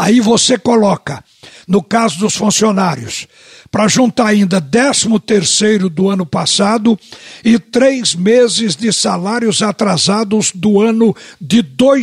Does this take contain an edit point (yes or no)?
no